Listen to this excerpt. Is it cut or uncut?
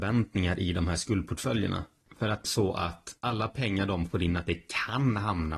cut